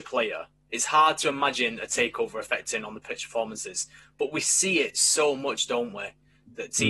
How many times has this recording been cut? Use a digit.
0